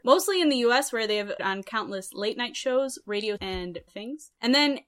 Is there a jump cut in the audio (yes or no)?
yes